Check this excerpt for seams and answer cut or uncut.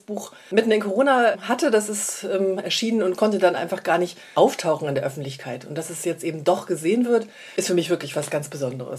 uncut